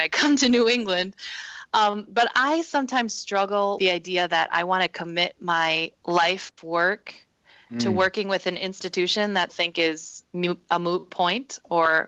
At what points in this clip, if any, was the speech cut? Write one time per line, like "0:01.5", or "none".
0:03.8
0:06.0
0:09.5